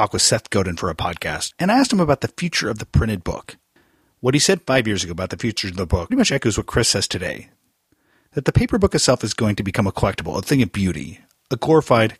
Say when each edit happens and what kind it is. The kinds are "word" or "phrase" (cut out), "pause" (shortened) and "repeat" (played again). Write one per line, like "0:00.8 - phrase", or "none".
0:06.1 - word